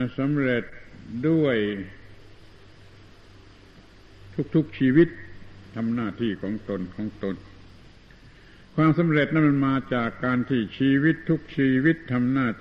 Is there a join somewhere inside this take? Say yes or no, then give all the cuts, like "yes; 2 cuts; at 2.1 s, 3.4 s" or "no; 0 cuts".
no; 0 cuts